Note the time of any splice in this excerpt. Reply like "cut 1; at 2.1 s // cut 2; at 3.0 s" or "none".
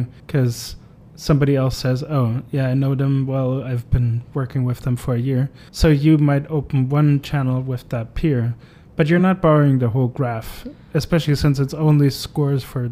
none